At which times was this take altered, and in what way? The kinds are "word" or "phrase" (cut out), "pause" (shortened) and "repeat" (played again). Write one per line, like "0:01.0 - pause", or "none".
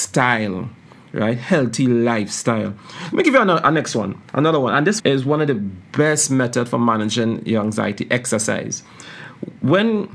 0:05.0 - word